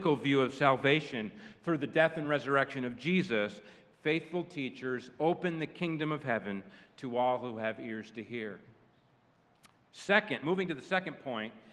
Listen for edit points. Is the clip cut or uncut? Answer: uncut